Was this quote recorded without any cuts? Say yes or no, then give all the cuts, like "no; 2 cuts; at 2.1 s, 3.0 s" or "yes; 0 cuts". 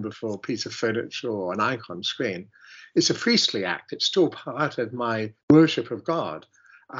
no; 1 cut; at 5.4 s